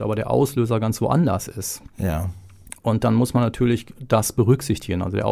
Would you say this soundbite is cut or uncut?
uncut